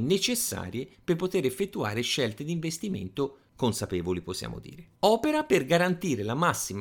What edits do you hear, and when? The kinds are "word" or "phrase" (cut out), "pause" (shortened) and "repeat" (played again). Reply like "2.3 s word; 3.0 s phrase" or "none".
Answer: 5.0 s pause